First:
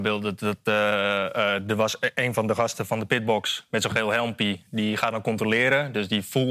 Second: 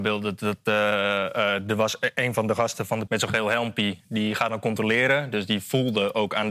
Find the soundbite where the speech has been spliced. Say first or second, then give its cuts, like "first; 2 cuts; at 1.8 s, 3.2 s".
second; 1 cut; at 3.1 s